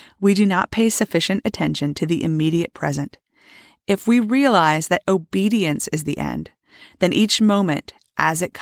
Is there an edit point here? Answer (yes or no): no